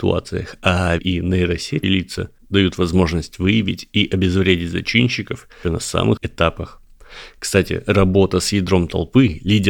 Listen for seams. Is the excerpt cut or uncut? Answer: cut